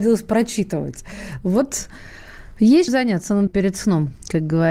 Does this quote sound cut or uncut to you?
cut